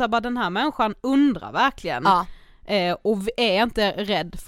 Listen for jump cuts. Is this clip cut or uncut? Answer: uncut